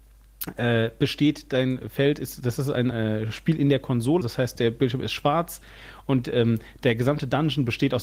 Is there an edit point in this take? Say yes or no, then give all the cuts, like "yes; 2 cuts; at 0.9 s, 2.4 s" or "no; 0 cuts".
yes; 2 cuts; at 2.9 s, 4.2 s